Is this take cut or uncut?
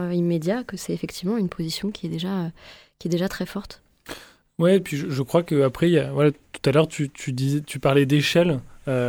uncut